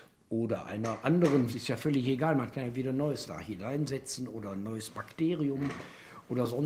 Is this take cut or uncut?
cut